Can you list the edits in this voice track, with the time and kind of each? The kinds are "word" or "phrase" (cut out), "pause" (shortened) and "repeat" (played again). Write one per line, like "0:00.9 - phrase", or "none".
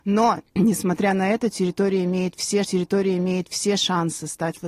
0:02.6 - repeat